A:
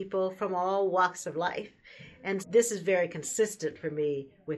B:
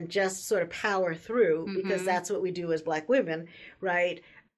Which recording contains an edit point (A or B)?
A